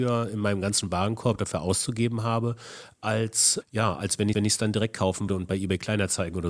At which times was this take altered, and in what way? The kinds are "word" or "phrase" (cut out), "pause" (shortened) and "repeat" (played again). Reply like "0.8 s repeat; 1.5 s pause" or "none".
3.6 s word; 4.3 s repeat; 5.3 s word